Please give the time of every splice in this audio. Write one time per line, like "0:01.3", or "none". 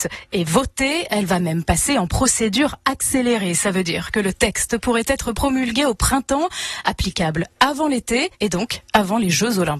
0:08.4

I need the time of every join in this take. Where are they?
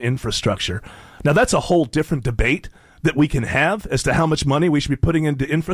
none

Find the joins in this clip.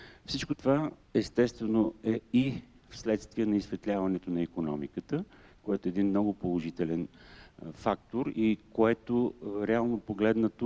0:01.0

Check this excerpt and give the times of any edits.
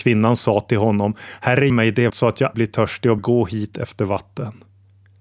0:01.7
0:02.1
0:02.5
0:03.2

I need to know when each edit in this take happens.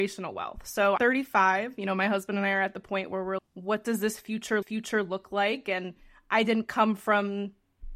0:01.0
0:03.4
0:04.6

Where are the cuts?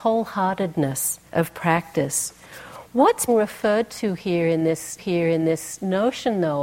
0:01.3
0:03.3
0:05.0

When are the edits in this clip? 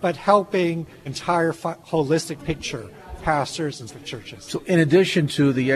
0:01.1
0:02.4
0:03.2
0:03.9

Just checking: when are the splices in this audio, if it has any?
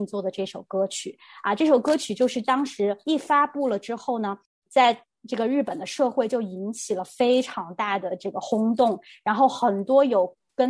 none

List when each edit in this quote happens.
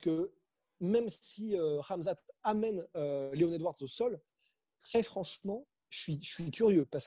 none

